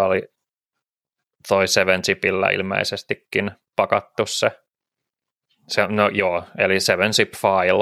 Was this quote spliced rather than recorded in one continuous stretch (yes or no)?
yes